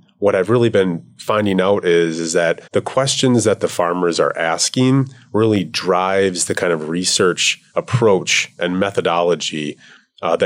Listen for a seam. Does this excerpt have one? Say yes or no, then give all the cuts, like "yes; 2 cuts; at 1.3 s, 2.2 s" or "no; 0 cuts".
yes; 1 cut; at 2.7 s